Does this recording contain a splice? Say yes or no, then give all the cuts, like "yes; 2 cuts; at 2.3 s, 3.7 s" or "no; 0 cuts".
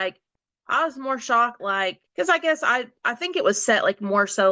yes; 2 cuts; at 1.6 s, 2.1 s